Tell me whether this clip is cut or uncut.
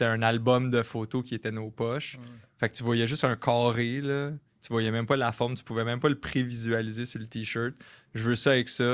uncut